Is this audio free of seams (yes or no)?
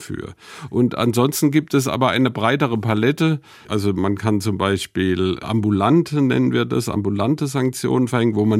yes